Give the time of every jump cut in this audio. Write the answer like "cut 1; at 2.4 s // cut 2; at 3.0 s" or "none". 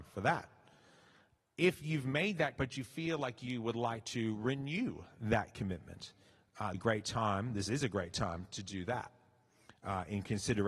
cut 1; at 2.6 s // cut 2; at 6.7 s